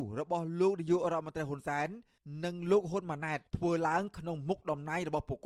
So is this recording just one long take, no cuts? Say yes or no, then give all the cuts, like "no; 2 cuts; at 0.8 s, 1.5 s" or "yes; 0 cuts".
no; 1 cut; at 3.5 s